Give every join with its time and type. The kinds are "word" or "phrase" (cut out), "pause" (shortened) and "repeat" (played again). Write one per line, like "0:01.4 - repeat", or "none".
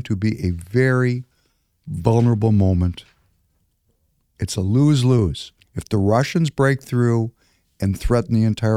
0:05.6 - pause